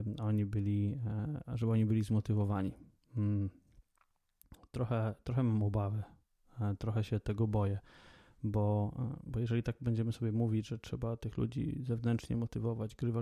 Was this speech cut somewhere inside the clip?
no; 0 cuts

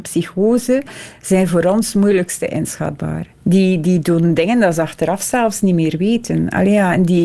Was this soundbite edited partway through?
yes; 1 cut; at 3.3 s

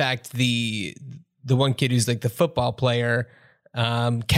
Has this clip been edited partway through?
no; 0 cuts

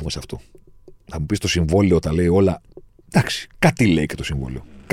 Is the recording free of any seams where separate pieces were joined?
no; 1 cut; at 1.0 s

